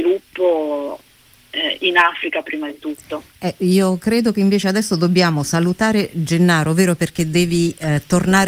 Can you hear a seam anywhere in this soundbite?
no; 0 cuts

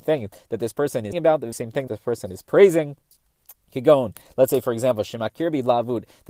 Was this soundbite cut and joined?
yes; 3 cuts; at 1.1 s, 1.5 s, 1.9 s

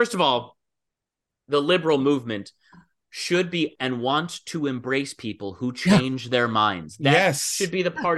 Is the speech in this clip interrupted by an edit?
yes; 1 cut; at 3.7 s

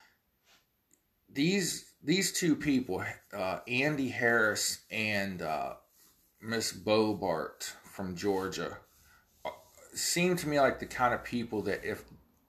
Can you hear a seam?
no; 0 cuts

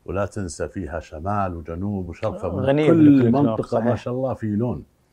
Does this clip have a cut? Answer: no; 0 cuts

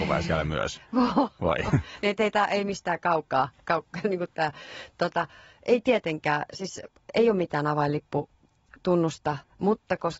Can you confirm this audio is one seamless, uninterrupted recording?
yes; 0 cuts

